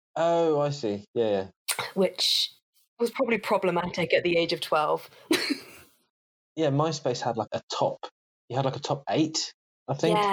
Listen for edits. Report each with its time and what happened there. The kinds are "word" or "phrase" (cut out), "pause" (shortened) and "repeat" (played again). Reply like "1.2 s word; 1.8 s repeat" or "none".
7.5 s word